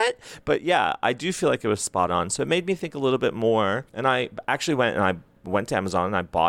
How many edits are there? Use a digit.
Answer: 1